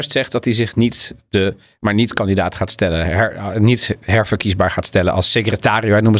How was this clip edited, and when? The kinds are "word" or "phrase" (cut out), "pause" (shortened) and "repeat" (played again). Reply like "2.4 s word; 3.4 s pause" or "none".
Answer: none